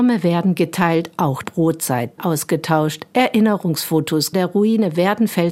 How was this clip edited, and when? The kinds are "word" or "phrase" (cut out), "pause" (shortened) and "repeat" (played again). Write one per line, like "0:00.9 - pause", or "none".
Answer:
0:01.4 - word
0:02.2 - word
0:04.3 - phrase